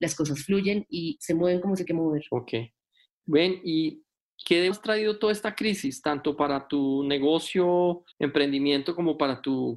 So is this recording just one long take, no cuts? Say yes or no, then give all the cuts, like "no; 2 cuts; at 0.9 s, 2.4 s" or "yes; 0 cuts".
no; 4 cuts; at 1.2 s, 1.9 s, 4.7 s, 8.1 s